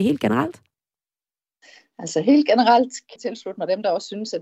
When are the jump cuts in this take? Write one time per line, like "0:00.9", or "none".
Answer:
0:03.2